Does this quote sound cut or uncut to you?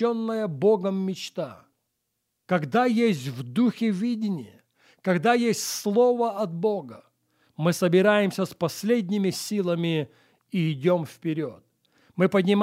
uncut